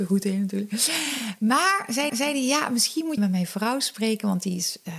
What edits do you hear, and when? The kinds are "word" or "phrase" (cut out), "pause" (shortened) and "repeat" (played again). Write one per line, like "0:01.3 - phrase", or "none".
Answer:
0:02.1 - repeat
0:03.2 - phrase